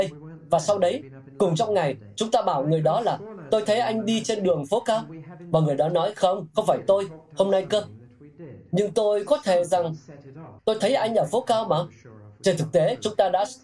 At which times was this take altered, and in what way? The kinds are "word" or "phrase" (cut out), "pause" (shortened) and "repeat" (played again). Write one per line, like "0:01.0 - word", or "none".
0:07.7 - phrase
0:10.6 - pause